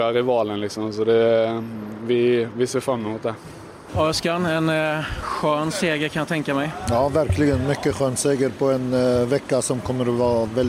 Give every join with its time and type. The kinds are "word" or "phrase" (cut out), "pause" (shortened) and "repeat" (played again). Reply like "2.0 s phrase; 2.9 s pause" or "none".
none